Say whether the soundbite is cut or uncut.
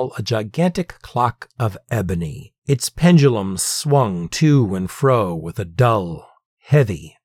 uncut